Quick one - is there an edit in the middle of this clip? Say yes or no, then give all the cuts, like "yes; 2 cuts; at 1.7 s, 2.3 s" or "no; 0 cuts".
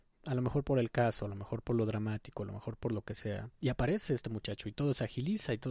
yes; 1 cut; at 3.5 s